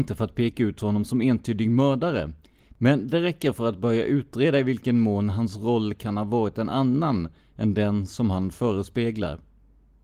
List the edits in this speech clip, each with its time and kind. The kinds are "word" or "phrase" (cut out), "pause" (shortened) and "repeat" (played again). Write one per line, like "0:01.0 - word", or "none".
none